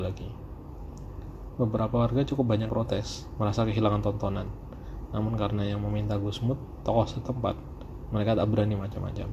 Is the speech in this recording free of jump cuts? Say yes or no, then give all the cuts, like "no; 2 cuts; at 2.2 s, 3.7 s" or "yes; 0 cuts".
no; 1 cut; at 2.7 s